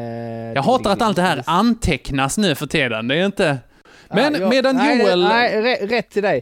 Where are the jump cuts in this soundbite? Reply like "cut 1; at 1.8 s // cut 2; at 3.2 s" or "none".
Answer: none